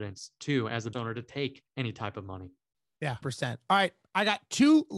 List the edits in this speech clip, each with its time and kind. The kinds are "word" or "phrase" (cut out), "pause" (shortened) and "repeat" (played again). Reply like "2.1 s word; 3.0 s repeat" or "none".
0.9 s word; 1.7 s pause; 3.2 s word